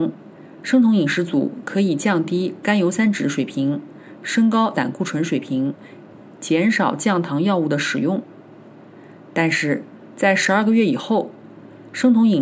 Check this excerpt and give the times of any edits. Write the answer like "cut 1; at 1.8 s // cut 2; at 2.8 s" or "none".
cut 1; at 4.7 s